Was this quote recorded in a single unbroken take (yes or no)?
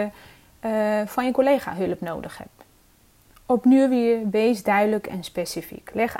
yes